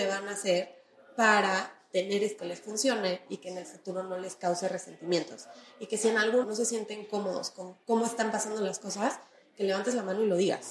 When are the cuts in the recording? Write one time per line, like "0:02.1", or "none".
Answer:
0:02.4
0:06.4